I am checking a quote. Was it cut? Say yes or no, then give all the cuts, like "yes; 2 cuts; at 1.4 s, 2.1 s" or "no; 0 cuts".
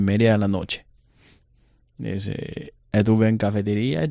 no; 0 cuts